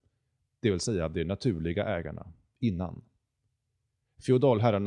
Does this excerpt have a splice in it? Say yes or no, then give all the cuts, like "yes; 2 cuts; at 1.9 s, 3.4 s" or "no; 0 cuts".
no; 0 cuts